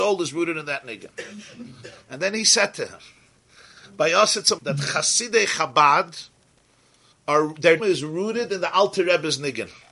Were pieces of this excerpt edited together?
yes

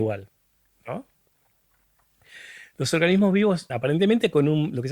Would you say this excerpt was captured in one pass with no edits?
no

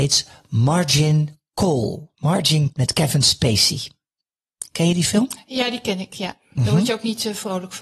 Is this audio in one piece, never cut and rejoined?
no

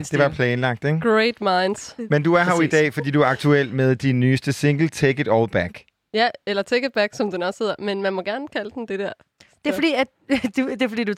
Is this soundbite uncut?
yes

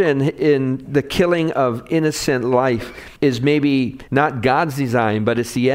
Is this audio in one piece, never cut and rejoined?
no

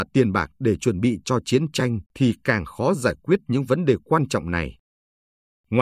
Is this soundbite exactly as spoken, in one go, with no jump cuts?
no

